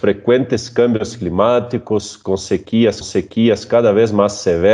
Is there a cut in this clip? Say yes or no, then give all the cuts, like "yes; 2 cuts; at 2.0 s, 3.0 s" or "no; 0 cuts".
yes; 1 cut; at 3.0 s